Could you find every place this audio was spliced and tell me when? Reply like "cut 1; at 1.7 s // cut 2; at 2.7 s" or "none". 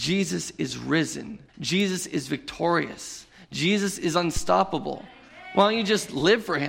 cut 1; at 1.5 s